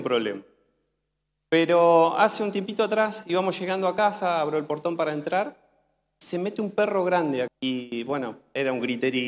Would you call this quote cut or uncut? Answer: cut